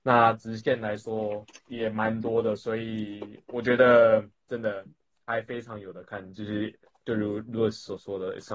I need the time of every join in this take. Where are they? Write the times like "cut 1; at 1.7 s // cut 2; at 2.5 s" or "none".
cut 1; at 1.6 s // cut 2; at 5.0 s